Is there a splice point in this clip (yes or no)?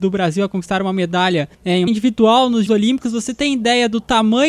yes